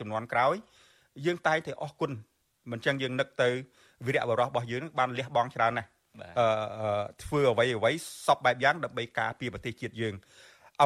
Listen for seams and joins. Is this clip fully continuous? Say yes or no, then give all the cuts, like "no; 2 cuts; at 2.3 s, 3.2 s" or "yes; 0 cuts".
yes; 0 cuts